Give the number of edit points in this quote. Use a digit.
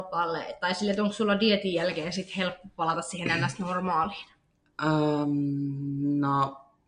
0